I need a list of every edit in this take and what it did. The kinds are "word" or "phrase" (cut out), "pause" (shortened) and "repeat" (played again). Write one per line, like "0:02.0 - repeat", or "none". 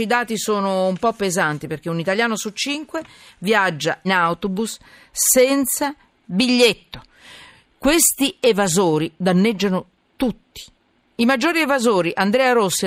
0:04.0 - word

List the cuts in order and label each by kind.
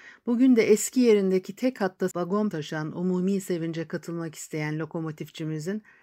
0:02.1 - word
0:02.5 - word

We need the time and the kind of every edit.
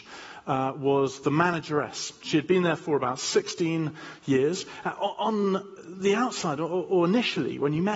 none

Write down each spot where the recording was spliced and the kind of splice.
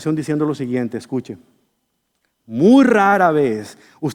none

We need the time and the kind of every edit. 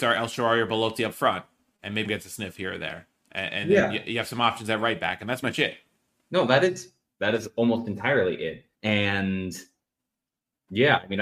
0:02.0 - word
0:05.4 - word
0:08.7 - pause

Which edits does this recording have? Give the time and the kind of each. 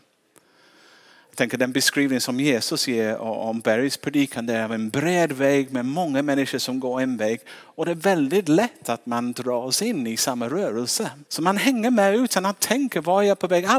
0:11.3 - pause

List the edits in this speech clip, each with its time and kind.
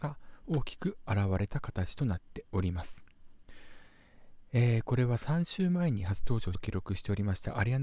0:06.5 - word

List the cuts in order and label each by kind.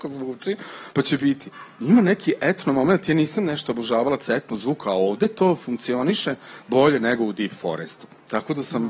0:00.9 - pause

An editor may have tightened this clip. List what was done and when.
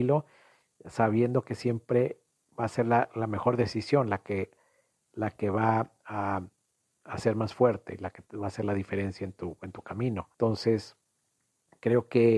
0:10.3 - pause

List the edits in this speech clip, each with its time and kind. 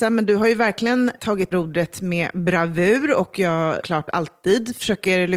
0:01.5 - word
0:03.8 - word

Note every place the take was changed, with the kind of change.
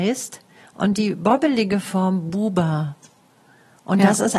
none

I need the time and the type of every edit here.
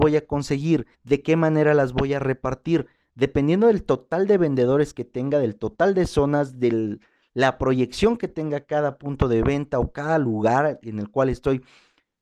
0:00.9 - pause

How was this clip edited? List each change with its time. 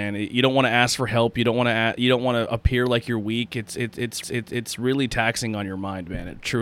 0:04.2 - repeat

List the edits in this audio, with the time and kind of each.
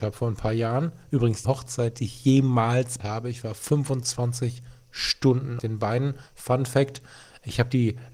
0:01.4 - word
0:03.0 - word
0:05.6 - word
0:06.3 - pause

